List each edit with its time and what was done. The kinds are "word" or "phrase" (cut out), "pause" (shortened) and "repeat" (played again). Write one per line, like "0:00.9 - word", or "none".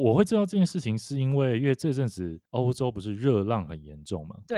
0:02.5 - pause

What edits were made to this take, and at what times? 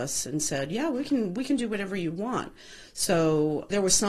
none

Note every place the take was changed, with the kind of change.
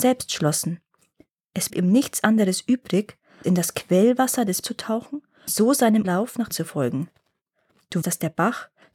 0:01.7 - word
0:03.4 - word
0:04.6 - word
0:05.5 - word
0:06.0 - word
0:06.5 - word
0:08.0 - word

